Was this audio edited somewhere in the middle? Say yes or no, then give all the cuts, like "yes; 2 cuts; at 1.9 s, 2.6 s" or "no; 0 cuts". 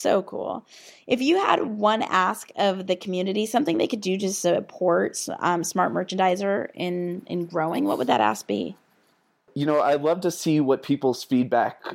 no; 0 cuts